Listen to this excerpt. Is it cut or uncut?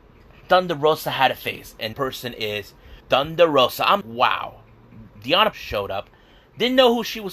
cut